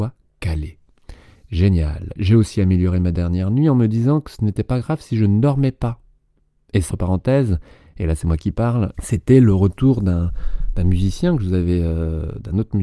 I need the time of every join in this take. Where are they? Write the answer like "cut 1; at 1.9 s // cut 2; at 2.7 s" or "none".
cut 1; at 6.9 s // cut 2; at 8.9 s